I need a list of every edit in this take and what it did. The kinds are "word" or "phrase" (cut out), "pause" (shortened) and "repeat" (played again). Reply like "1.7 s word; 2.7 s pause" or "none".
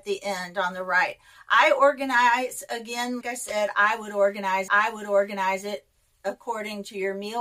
3.2 s word; 4.7 s repeat